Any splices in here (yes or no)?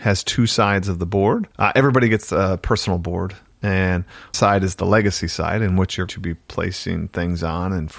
yes